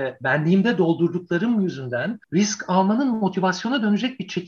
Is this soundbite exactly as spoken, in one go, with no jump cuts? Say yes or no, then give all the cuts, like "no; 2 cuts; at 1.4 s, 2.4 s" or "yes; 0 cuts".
no; 1 cut; at 2.2 s